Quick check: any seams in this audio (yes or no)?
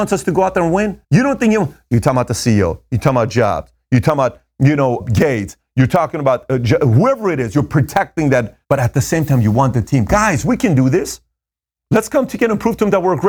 yes